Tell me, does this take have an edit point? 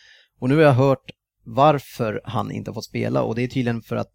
no; 0 cuts

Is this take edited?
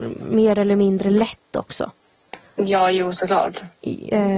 no; 0 cuts

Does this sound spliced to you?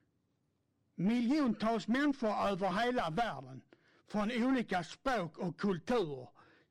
no; 0 cuts

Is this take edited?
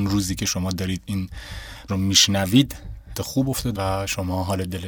yes; 3 cuts; at 1.9 s, 3.2 s, 3.8 s

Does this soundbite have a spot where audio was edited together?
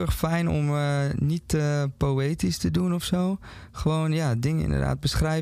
no; 0 cuts

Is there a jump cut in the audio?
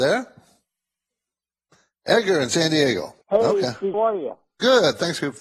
yes; 2 cuts; at 3.2 s, 3.9 s

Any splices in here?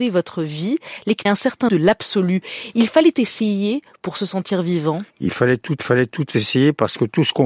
yes; 5 cuts; at 1.3 s, 1.7 s, 3.1 s, 5.1 s, 5.8 s

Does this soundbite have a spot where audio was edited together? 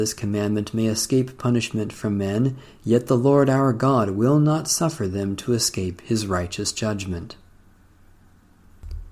no; 0 cuts

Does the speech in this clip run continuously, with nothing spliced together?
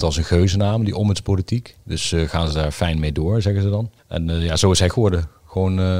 no; 2 cuts; at 4.0 s, 4.9 s

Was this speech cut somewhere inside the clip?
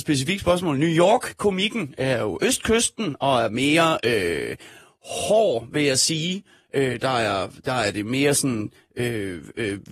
no; 0 cuts

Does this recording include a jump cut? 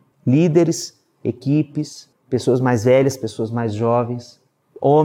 no; 0 cuts

